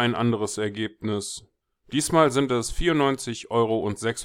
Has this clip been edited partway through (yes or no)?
yes